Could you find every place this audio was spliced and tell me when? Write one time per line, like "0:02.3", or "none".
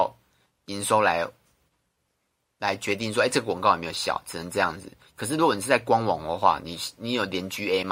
none